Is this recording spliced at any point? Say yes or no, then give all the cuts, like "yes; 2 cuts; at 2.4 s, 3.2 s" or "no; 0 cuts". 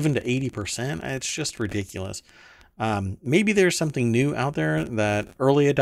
no; 0 cuts